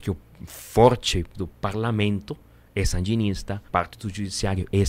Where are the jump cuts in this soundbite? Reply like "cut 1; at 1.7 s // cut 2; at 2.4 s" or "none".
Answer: cut 1; at 1.3 s // cut 2; at 3.7 s